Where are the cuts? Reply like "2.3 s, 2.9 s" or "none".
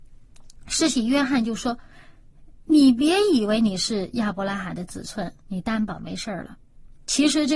2.6 s